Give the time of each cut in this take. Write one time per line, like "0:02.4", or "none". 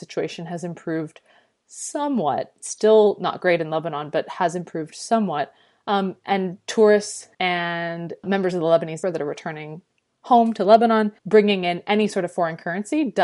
0:07.3
0:09.0
0:11.2